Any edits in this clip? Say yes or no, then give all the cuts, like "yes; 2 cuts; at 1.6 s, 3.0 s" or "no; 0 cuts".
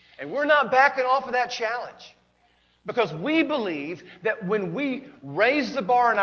no; 0 cuts